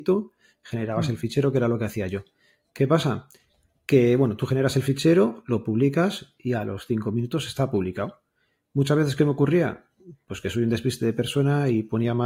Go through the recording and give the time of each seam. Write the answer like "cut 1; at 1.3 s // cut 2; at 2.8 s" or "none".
none

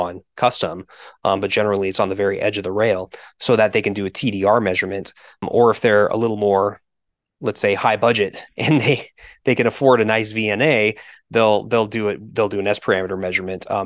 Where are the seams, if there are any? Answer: none

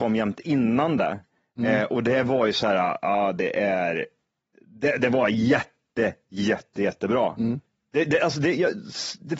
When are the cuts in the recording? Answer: none

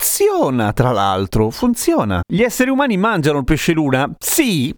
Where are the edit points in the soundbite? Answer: none

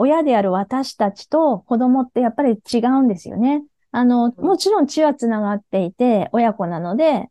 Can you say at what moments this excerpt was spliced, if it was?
none

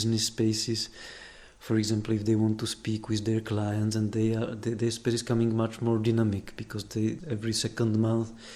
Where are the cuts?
cut 1; at 7.2 s

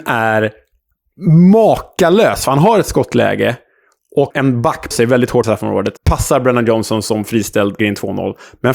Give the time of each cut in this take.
cut 1; at 4.3 s // cut 2; at 4.9 s // cut 3; at 5.4 s // cut 4; at 6.0 s // cut 5; at 7.8 s

